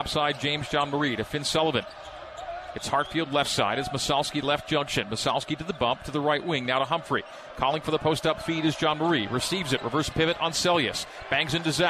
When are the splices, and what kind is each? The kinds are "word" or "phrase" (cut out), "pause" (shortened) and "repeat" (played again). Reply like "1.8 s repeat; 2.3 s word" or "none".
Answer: none